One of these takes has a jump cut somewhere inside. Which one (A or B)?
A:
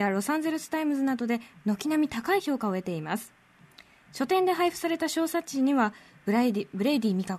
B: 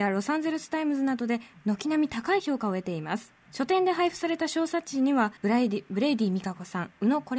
B